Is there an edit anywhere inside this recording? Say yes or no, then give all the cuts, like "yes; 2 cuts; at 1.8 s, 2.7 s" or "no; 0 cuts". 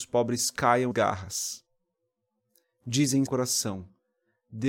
yes; 2 cuts; at 0.9 s, 3.3 s